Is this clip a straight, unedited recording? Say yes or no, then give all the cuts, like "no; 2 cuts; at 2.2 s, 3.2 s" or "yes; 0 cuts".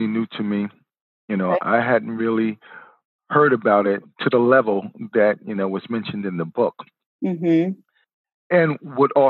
yes; 0 cuts